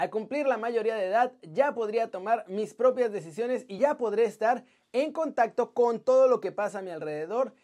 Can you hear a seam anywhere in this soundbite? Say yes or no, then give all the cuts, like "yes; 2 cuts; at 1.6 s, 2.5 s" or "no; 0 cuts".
no; 0 cuts